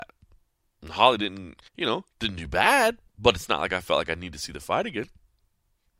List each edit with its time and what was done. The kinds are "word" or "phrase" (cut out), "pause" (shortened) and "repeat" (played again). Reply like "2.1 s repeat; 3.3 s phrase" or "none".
1.7 s pause; 2.1 s pause; 3.1 s pause